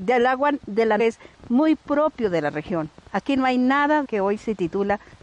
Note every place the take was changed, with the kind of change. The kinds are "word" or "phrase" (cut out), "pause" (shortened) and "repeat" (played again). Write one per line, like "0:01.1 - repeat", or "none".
0:01.0 - phrase
0:03.0 - pause
0:04.0 - phrase